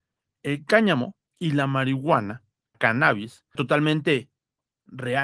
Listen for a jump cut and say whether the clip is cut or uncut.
cut